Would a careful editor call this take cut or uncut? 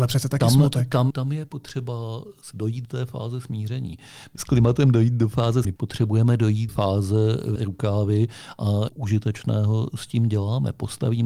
cut